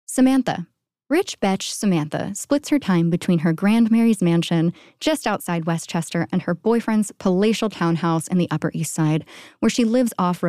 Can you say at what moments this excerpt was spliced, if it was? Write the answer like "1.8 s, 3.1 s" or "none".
none